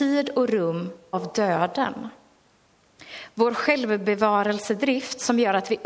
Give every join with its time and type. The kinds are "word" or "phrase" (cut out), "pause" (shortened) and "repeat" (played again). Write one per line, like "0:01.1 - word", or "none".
0:01.1 - word